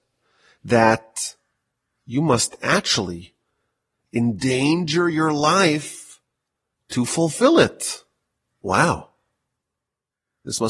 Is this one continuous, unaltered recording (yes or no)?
yes